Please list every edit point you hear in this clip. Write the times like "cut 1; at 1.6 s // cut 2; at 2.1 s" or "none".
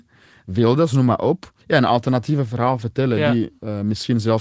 cut 1; at 1.6 s